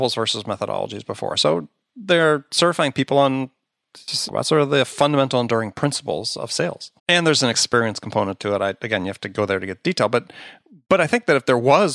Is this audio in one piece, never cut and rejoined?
no; 2 cuts; at 4.3 s, 7.0 s

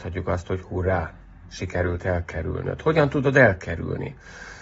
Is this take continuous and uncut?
yes; 0 cuts

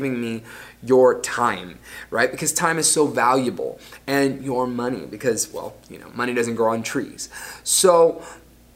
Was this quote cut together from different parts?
no; 0 cuts

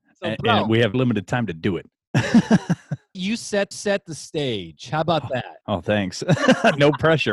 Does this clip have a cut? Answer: yes; 4 cuts; at 0.9 s, 3.1 s, 3.7 s, 5.6 s

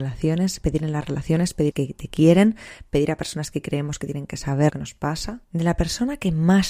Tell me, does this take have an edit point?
yes; 3 cuts; at 1.7 s, 4.7 s, 5.4 s

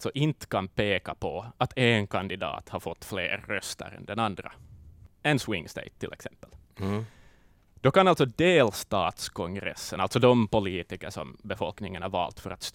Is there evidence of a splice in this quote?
no; 0 cuts

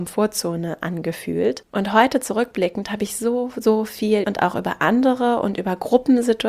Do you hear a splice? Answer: yes; 1 cut; at 4.2 s

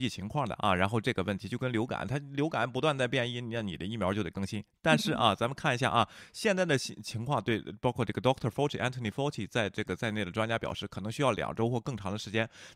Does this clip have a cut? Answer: no; 0 cuts

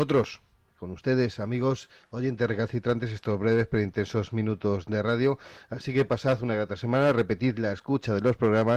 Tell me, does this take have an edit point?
no; 0 cuts

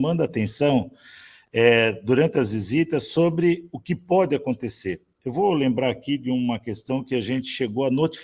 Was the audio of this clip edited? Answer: no; 0 cuts

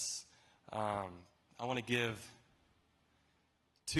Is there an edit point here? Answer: no; 0 cuts

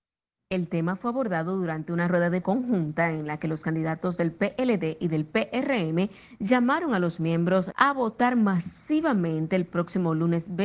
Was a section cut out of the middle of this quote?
yes; 2 cuts; at 2.4 s, 7.7 s

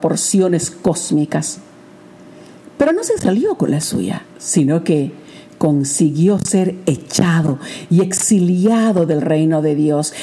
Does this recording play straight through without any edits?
no; 1 cut; at 4.3 s

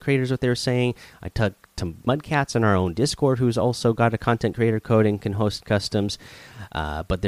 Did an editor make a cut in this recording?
no; 0 cuts

